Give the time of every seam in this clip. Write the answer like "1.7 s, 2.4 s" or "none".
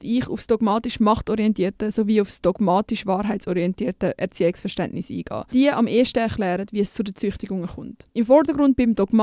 5.5 s, 8.1 s